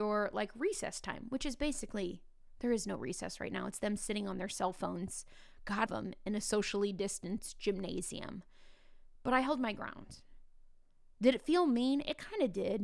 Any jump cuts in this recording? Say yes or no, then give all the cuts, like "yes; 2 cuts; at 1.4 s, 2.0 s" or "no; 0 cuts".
yes; 1 cut; at 5.9 s